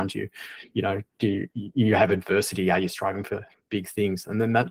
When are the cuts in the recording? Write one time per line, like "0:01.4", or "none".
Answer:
none